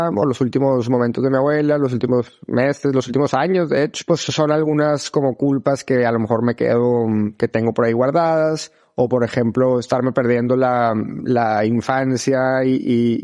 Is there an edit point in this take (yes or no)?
no